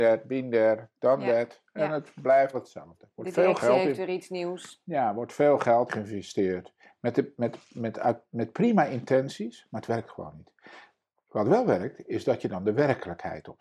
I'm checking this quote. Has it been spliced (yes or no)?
yes